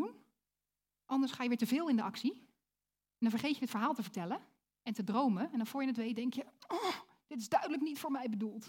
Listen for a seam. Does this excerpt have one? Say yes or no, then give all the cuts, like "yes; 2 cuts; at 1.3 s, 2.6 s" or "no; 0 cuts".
no; 0 cuts